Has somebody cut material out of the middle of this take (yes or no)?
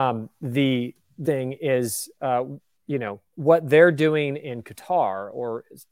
yes